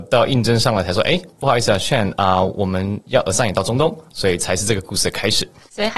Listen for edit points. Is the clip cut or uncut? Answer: uncut